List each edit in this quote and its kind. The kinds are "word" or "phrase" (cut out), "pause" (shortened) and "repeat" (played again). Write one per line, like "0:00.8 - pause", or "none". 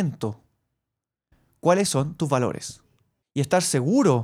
0:03.2 - pause